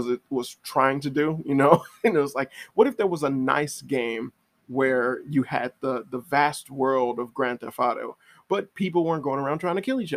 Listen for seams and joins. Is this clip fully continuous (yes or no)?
yes